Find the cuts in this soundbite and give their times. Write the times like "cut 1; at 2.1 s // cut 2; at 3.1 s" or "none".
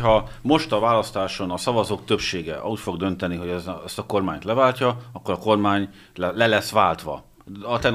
none